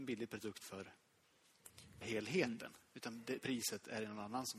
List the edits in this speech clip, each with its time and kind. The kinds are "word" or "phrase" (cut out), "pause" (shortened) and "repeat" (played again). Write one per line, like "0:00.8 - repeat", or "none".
0:02.0 - word
0:03.4 - word